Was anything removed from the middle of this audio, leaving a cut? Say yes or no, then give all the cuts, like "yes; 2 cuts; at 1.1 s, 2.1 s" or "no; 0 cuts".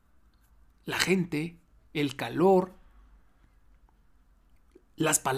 no; 0 cuts